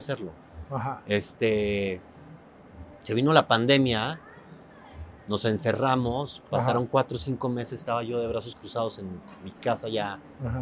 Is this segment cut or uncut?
uncut